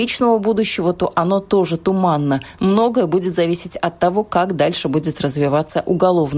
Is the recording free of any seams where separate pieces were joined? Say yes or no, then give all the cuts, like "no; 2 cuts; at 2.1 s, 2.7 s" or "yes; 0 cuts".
yes; 0 cuts